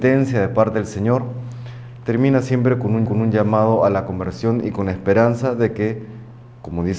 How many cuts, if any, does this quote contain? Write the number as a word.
one